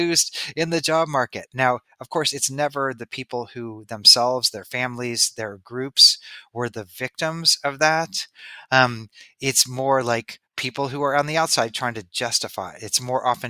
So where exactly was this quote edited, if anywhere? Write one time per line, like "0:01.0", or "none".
0:10.5